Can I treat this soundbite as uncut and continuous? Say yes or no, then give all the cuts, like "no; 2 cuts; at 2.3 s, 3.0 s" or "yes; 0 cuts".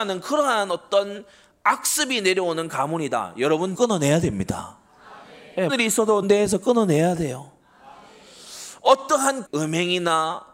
no; 4 cuts; at 3.7 s, 5.7 s, 6.2 s, 9.5 s